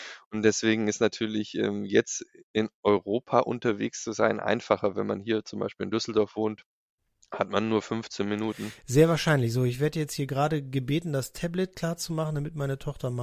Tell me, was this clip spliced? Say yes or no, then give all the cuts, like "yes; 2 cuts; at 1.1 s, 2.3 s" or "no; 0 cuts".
no; 0 cuts